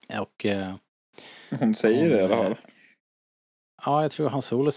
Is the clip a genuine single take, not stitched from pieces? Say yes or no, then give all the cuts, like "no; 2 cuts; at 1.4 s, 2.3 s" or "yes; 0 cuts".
yes; 0 cuts